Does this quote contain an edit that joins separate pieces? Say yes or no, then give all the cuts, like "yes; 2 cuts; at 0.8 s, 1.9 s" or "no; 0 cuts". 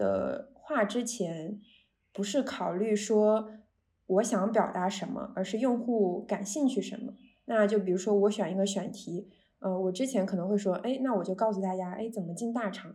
no; 0 cuts